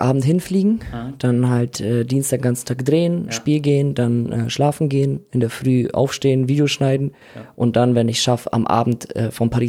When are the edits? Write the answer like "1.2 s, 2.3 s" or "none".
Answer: none